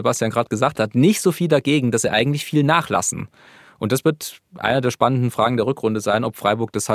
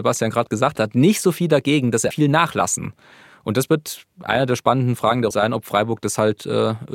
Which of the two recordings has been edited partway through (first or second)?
second